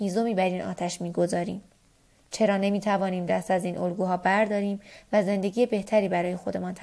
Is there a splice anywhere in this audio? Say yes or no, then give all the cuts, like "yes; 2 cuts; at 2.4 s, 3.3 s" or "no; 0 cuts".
no; 0 cuts